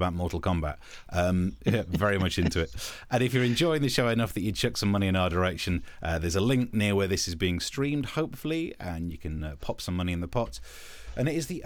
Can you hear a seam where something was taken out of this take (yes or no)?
no